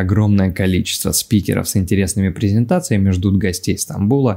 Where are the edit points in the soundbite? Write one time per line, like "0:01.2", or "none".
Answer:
none